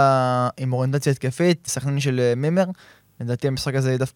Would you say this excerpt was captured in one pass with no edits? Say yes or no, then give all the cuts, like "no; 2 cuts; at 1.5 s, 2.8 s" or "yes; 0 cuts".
no; 1 cut; at 1.7 s